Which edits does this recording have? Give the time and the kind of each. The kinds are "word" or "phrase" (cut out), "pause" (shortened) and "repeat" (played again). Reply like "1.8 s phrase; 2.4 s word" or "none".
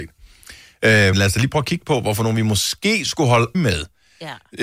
1.1 s word; 3.5 s word